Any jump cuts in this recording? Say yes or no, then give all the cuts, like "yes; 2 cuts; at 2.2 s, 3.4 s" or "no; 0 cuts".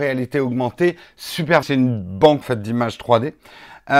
yes; 2 cuts; at 1.6 s, 2.4 s